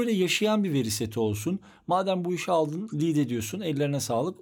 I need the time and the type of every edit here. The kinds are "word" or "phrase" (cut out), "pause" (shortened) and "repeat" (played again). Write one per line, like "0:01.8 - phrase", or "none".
none